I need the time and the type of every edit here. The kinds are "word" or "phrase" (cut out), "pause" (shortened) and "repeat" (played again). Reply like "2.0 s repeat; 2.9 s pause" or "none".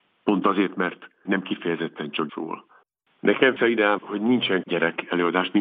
1.3 s word; 2.3 s word; 3.6 s word; 4.0 s word; 4.6 s word

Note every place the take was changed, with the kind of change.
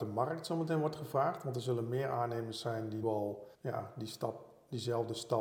3.0 s word; 3.5 s pause

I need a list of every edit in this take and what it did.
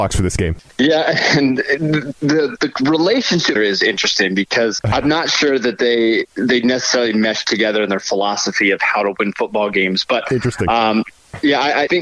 3.6 s phrase

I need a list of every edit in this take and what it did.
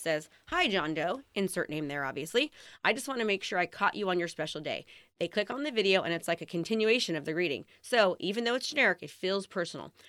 none

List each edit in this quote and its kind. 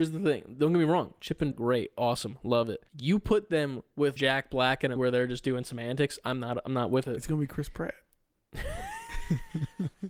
1.5 s word; 2.9 s pause; 4.2 s phrase; 5.0 s word

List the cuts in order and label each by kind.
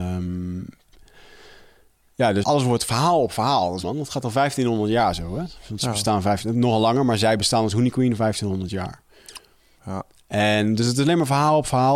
2.4 s word; 3.8 s word

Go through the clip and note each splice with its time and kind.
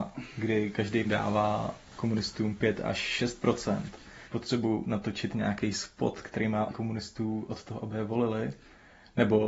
1.0 s word; 1.9 s pause; 4.3 s word; 6.7 s phrase

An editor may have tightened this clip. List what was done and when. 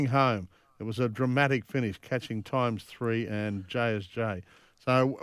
none

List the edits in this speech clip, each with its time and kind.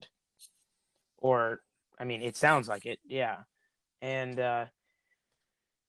none

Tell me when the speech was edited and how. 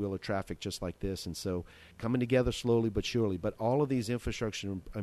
1.9 s pause

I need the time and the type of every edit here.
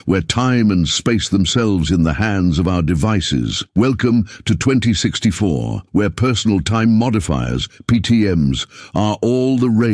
1.9 s phrase; 3.7 s pause; 5.9 s pause

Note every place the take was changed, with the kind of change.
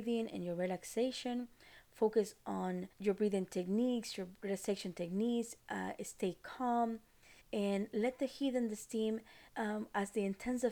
2.9 s pause; 5.6 s pause; 7.4 s pause; 9.5 s pause

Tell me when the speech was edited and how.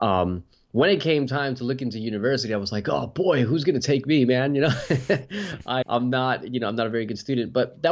5.8 s word

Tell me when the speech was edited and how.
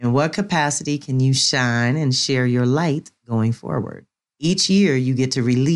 none

